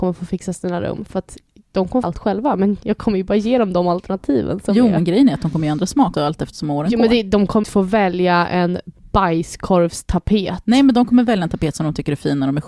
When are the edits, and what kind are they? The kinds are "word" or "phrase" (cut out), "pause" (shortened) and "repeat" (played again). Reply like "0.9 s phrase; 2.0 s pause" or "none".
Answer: 2.0 s word; 6.1 s word; 7.6 s word